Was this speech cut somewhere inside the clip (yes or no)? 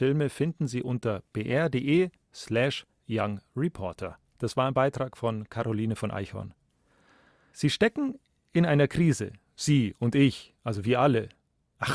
no